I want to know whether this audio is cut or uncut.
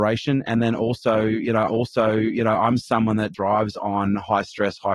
cut